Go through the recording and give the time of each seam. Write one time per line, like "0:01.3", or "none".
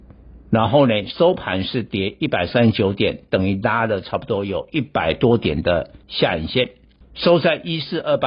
0:06.0
0:07.0

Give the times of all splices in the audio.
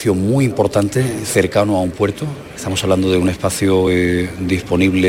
none

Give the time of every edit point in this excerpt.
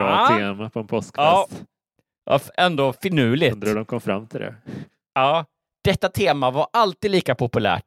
none

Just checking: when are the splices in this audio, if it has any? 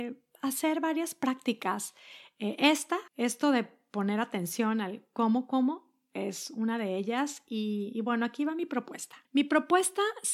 0:03.1
0:09.2

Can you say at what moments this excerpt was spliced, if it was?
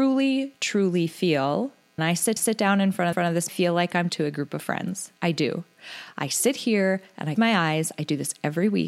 0:02.0
0:02.4
0:03.1
0:03.5
0:04.1
0:05.2
0:07.4

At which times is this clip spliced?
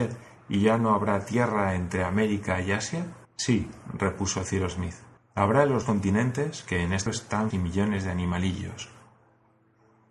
0:03.2
0:05.2
0:05.8
0:07.1
0:07.5

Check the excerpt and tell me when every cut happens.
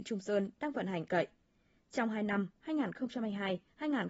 0:01.1

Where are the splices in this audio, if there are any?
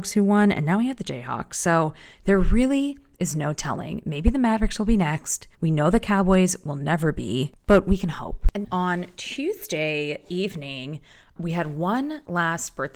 0:02.1
0:05.5
0:08.6
0:11.4

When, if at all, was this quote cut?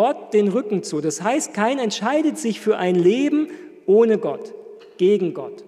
none

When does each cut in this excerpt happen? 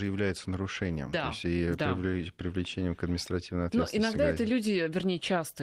none

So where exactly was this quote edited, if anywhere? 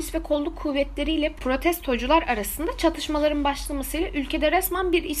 none

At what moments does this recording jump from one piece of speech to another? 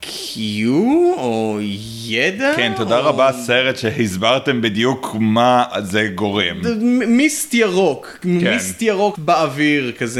0:09.1

